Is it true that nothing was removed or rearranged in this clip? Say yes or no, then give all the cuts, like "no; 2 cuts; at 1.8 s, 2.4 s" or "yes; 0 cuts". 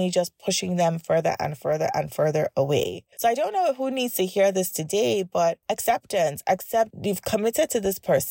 no; 2 cuts; at 3.1 s, 5.6 s